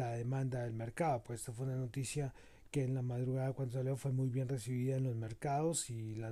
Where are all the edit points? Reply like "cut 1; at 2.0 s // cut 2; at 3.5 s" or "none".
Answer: none